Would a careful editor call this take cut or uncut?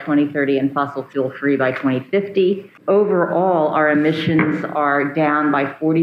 cut